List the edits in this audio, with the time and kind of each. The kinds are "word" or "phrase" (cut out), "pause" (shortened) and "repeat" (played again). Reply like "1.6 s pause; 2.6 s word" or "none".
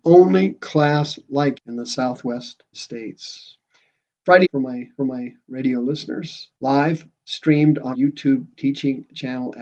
1.5 s phrase; 2.7 s word; 4.4 s phrase; 5.0 s repeat; 6.5 s pause; 7.9 s word